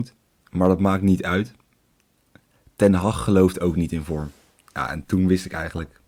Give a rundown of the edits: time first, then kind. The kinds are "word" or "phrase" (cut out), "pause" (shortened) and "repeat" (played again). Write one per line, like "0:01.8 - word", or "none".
none